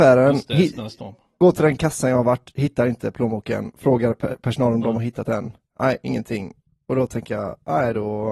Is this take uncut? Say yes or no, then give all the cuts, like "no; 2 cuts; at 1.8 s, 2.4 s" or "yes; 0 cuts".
yes; 0 cuts